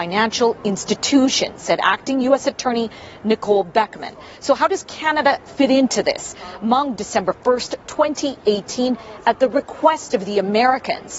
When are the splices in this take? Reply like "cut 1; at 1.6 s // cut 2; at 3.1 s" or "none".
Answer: cut 1; at 7.0 s